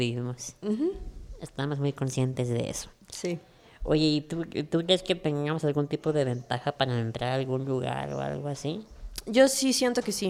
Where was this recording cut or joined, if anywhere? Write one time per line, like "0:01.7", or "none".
none